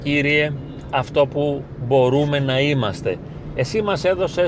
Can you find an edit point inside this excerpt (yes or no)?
no